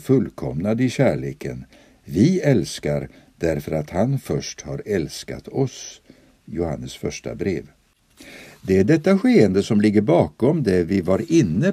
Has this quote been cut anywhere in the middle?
no; 0 cuts

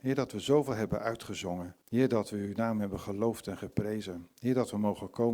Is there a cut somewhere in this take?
yes; 1 cut; at 1.8 s

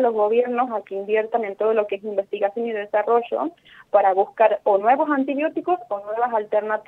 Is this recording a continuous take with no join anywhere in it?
yes; 0 cuts

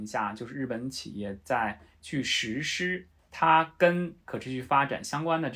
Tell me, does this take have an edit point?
yes; 2 cuts; at 3.2 s, 4.2 s

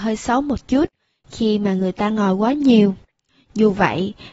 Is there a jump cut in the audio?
no; 0 cuts

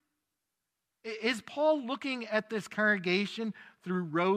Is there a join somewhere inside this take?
no; 0 cuts

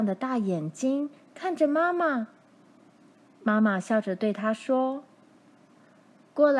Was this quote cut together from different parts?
no; 0 cuts

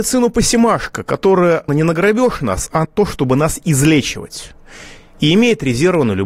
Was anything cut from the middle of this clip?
yes; 2 cuts; at 1.7 s, 2.8 s

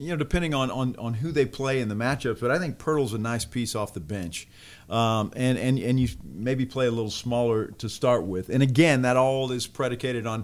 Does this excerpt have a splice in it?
no; 0 cuts

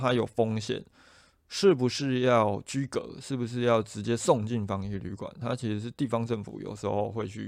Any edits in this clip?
no; 0 cuts

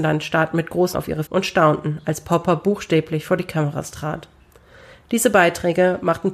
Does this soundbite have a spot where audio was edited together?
yes; 2 cuts; at 0.9 s, 1.3 s

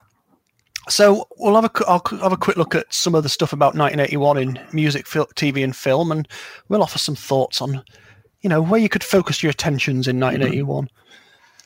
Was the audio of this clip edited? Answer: no; 0 cuts

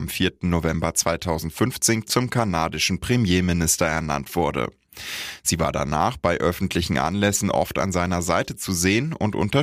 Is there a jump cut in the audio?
no; 0 cuts

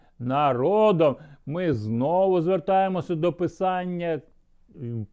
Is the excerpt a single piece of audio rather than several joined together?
yes; 0 cuts

